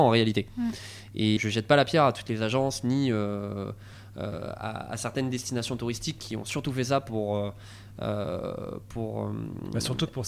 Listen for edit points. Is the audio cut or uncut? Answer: cut